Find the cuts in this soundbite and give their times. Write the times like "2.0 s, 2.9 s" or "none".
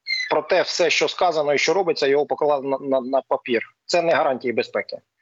none